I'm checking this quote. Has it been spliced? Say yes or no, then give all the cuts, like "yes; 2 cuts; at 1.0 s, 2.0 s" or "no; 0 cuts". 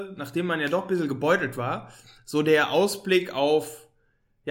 no; 0 cuts